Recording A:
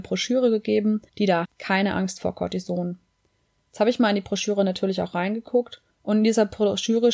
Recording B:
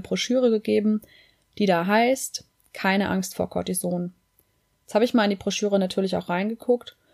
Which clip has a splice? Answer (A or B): A